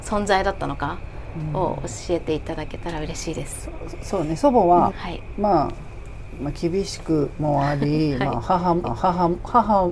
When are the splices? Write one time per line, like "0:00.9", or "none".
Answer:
0:03.9
0:04.9
0:08.8